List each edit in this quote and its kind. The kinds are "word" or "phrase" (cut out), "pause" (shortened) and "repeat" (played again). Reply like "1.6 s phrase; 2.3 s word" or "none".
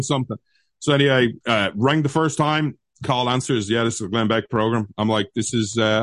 1.4 s pause